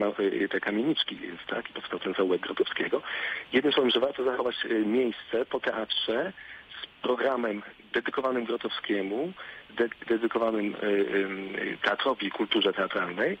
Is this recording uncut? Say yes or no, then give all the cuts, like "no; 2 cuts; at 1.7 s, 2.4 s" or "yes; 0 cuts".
no; 1 cut; at 1.5 s